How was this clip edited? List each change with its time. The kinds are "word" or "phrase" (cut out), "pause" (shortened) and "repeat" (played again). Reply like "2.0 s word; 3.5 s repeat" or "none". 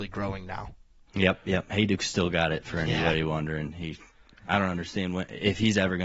none